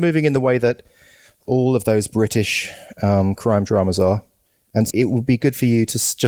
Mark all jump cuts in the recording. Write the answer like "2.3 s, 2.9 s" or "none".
4.9 s